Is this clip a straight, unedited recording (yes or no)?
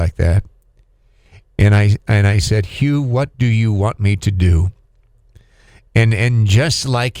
yes